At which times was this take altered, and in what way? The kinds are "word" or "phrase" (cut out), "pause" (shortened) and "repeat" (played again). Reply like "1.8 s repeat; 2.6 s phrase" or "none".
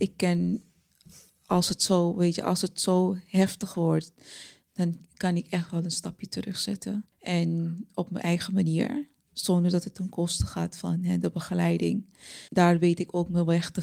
7.1 s pause; 12.5 s pause